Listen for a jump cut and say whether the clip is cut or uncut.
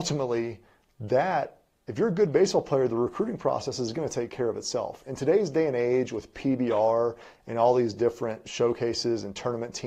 uncut